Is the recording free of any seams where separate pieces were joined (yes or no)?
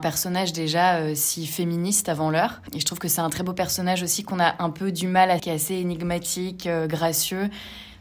no